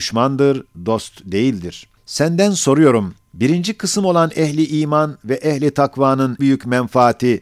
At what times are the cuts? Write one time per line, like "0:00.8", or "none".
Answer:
0:02.0
0:03.2
0:06.4